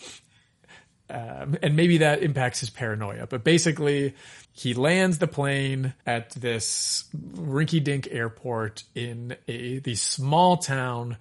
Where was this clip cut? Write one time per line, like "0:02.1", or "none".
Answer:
0:04.4
0:06.0